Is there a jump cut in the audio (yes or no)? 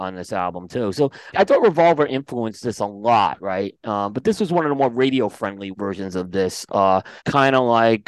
yes